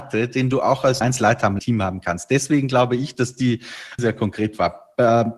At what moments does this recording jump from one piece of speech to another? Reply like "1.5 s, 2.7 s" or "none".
1.0 s, 1.6 s, 4.0 s